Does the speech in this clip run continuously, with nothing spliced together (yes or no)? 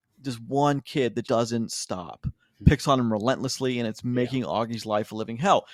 no